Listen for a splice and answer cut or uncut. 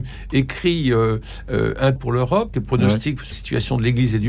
cut